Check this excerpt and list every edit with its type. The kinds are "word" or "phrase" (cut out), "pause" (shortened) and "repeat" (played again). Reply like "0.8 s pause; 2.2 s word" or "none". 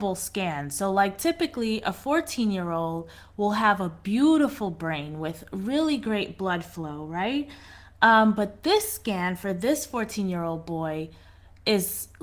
none